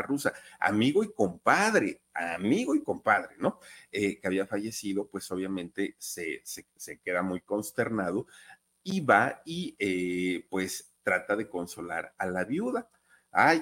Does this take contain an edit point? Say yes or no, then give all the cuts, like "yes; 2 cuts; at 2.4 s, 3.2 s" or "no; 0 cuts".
no; 0 cuts